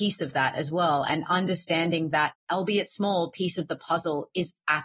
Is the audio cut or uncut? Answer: uncut